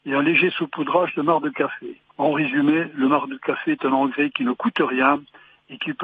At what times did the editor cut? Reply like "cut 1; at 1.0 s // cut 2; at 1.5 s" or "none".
cut 1; at 2.1 s